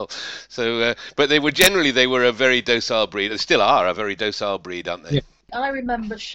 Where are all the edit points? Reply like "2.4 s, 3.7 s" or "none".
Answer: none

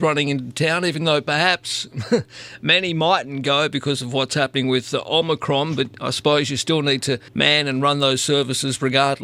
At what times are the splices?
7.3 s

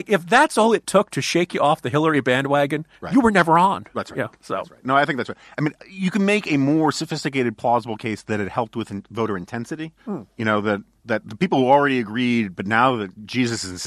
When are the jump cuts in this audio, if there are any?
3.0 s, 5.8 s, 10.0 s

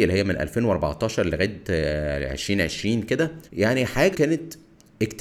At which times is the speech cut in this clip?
3.5 s, 4.1 s

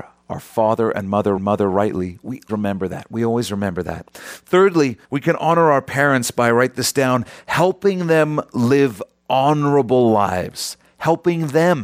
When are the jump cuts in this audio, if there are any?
1.4 s, 2.5 s, 5.0 s

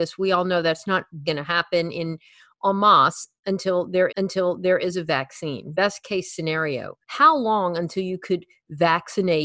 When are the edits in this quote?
1.2 s, 4.1 s, 5.7 s, 7.0 s

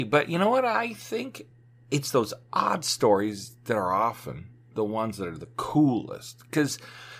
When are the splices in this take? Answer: none

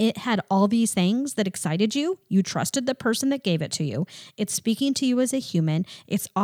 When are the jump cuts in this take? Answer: none

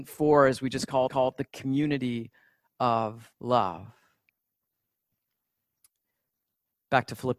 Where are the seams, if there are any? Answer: 1.1 s, 3.3 s

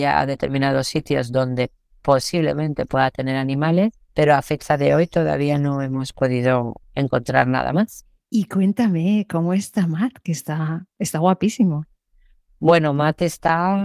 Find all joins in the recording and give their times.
4.1 s, 6.8 s

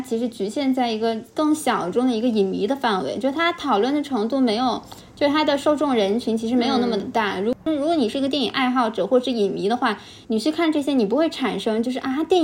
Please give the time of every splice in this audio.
10.2 s

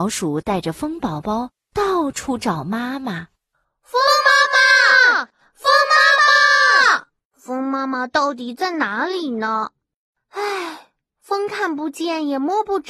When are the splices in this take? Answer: none

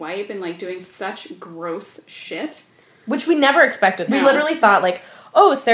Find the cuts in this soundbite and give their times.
4.1 s

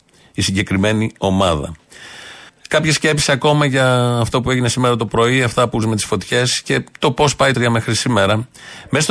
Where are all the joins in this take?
2.5 s, 5.8 s, 7.5 s

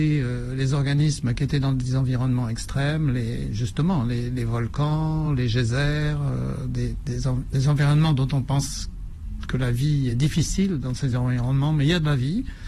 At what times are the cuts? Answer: none

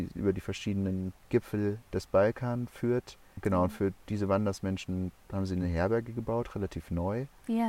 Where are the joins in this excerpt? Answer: none

